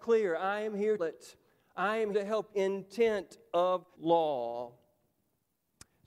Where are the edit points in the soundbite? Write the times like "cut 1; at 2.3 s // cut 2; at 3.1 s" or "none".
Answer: cut 1; at 1.0 s // cut 2; at 2.1 s // cut 3; at 2.5 s // cut 4; at 3.9 s